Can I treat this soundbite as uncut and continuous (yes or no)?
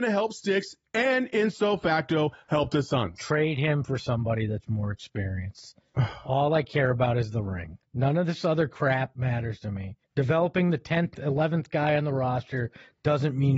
no